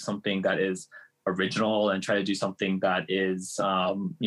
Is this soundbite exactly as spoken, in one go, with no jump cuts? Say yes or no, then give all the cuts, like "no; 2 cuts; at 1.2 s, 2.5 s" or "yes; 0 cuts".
yes; 0 cuts